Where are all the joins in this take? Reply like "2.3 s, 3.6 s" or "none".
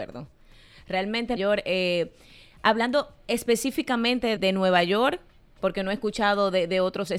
1.4 s, 4.4 s